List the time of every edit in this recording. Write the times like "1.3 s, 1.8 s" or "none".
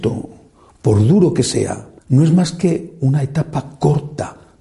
2.0 s

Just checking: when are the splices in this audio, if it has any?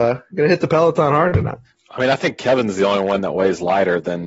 none

